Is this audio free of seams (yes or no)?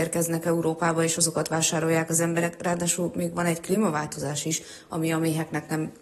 yes